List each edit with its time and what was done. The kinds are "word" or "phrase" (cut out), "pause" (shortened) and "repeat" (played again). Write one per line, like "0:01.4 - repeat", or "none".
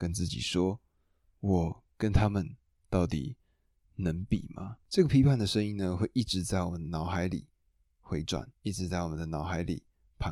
0:08.5 - pause